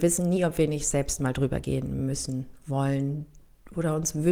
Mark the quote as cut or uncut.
uncut